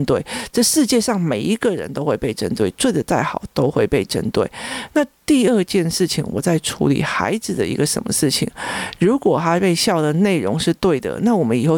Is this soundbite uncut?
yes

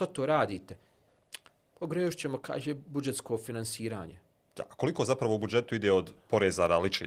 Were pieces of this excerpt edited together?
no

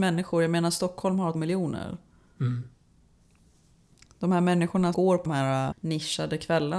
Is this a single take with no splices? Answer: no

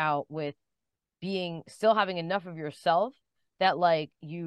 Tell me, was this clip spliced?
no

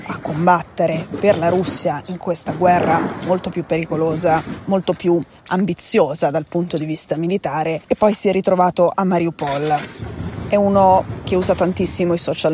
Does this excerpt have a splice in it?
yes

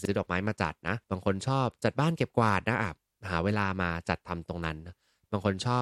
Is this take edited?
yes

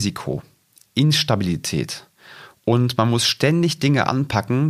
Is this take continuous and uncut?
yes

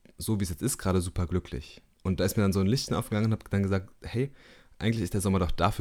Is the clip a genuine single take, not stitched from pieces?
yes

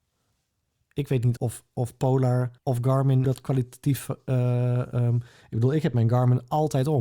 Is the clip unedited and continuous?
no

